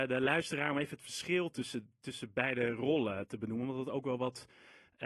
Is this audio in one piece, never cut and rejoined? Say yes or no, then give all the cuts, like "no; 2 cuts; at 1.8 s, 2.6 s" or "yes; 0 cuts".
yes; 0 cuts